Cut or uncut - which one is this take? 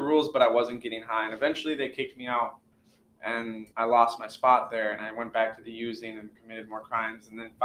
cut